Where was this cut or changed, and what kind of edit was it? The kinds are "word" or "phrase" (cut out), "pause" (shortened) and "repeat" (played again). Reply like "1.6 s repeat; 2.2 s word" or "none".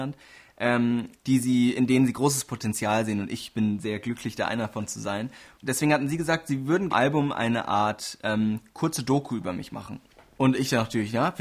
1.2 s pause; 6.9 s phrase

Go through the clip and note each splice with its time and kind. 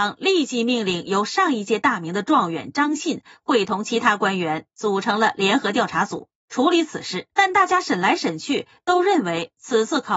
7.3 s pause

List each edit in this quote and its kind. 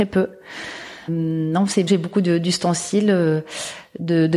1.1 s word; 1.9 s word

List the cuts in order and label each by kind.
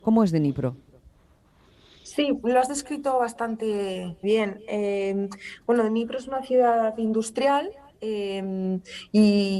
4.2 s word

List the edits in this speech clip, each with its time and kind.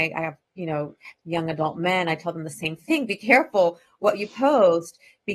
none

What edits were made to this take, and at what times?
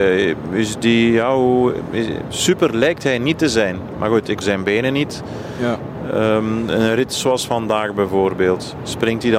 4.4 s word

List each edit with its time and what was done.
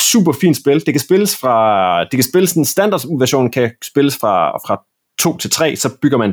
none

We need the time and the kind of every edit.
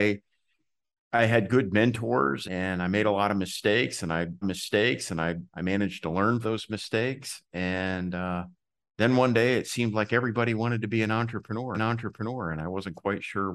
2.4 s word; 4.4 s repeat; 6.4 s phrase; 11.7 s repeat

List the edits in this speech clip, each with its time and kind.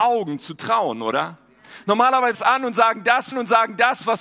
2.3 s phrase; 3.3 s repeat

